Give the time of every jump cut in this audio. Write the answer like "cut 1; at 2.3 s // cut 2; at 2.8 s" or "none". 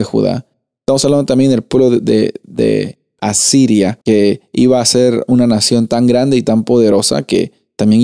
cut 1; at 4.0 s

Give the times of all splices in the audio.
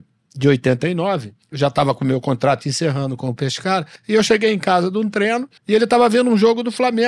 cut 1; at 1.4 s // cut 2; at 4.0 s // cut 3; at 5.6 s

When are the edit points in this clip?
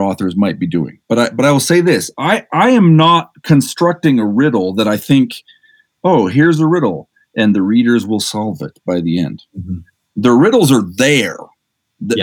none

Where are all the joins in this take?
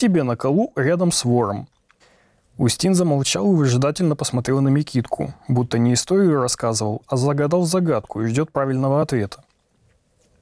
none

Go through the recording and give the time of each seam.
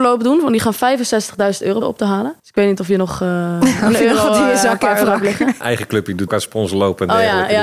cut 1; at 1.8 s // cut 2; at 2.4 s // cut 3; at 5.6 s // cut 4; at 6.3 s

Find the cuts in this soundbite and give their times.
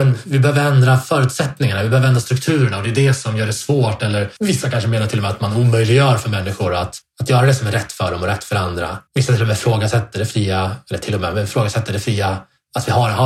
cut 1; at 9.1 s

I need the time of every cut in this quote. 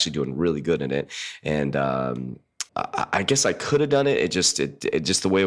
cut 1; at 2.7 s

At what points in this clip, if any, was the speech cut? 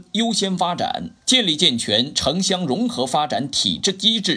cut 1; at 1.2 s

